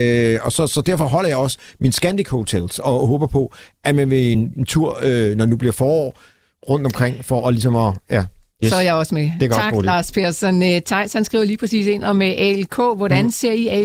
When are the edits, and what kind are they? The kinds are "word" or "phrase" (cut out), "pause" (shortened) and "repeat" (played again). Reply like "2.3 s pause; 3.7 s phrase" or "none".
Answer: none